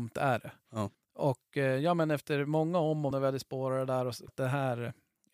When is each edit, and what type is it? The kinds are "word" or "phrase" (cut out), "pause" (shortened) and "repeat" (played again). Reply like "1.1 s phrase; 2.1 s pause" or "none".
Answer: 0.9 s pause; 3.1 s word; 4.3 s word